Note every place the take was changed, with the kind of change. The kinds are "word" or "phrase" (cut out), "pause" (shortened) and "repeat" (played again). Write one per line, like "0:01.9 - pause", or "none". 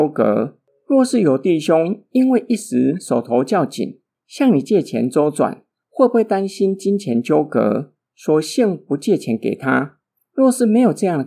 none